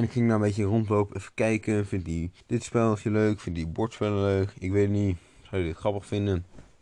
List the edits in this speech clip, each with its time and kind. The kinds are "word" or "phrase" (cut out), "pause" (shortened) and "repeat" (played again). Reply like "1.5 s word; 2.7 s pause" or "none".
2.4 s pause